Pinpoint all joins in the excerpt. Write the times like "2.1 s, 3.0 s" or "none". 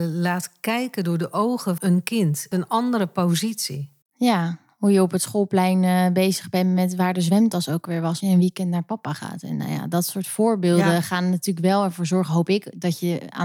1.8 s, 2.5 s, 8.2 s